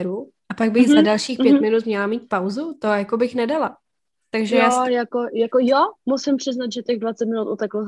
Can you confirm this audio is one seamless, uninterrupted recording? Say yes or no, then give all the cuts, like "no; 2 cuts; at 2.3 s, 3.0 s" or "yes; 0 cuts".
yes; 0 cuts